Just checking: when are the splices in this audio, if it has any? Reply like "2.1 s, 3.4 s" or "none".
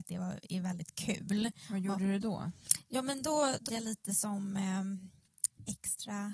3.7 s